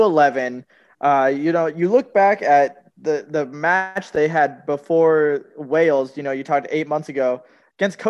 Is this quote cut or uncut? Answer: uncut